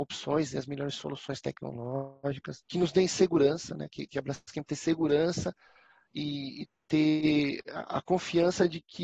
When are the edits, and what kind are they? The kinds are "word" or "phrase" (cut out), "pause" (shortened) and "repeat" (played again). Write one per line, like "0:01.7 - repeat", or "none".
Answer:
0:04.6 - word